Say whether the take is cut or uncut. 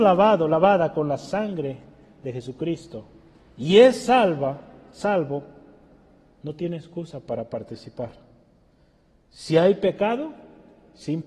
uncut